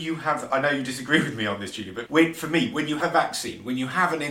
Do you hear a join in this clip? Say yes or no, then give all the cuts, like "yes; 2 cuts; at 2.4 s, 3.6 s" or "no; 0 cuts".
yes; 2 cuts; at 2.1 s, 3.0 s